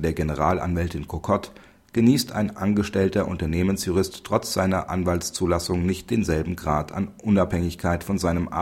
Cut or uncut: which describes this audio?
uncut